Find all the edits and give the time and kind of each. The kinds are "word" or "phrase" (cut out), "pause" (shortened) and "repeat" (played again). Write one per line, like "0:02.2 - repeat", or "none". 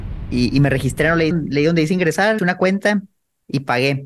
0:01.3 - word
0:02.4 - word